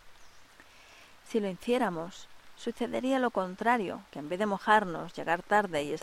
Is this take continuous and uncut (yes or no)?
no